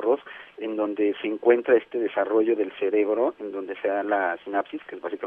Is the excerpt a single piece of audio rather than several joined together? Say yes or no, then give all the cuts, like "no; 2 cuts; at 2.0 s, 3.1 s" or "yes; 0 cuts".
yes; 0 cuts